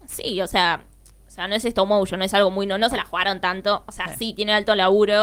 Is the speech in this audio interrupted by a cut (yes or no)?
no